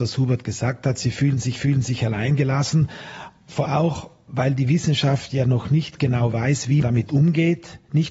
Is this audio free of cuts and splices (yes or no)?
no